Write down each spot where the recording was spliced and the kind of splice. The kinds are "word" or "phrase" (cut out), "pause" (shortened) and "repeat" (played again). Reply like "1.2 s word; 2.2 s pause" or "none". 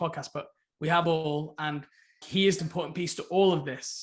1.0 s word; 2.2 s word; 2.6 s phrase